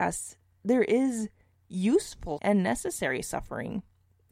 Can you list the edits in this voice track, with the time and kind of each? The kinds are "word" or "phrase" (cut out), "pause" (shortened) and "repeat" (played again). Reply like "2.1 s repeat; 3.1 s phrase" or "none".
2.4 s word